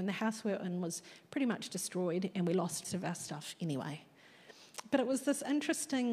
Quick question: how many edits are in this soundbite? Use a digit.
1